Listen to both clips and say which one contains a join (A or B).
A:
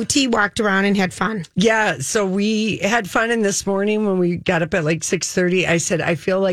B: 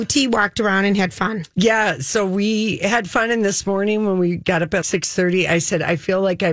B